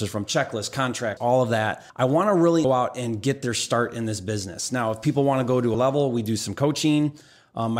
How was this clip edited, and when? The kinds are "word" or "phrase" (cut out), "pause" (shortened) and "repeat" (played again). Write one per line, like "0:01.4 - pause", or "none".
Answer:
0:01.2 - word
0:01.9 - pause
0:02.6 - phrase
0:05.7 - phrase